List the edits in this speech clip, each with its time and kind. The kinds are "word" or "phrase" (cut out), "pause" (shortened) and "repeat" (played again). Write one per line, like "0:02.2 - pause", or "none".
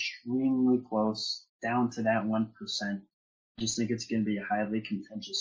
0:01.5 - pause